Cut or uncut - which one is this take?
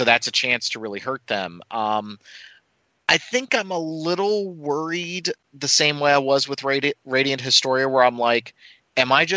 uncut